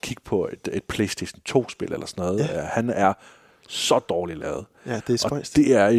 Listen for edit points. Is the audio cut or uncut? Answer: uncut